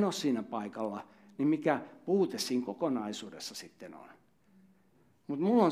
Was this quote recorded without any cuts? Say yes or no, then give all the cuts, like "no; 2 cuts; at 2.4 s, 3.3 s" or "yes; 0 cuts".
yes; 0 cuts